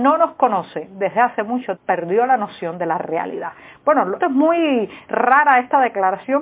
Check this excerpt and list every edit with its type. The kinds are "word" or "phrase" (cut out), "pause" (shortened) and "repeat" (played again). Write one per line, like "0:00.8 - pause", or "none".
0:01.8 - word
0:04.2 - word